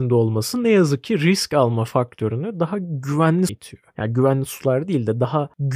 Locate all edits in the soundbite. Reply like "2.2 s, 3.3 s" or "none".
3.5 s